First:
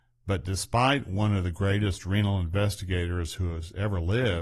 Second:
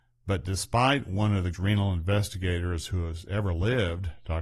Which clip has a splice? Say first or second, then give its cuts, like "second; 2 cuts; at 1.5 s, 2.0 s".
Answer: second; 1 cut; at 1.5 s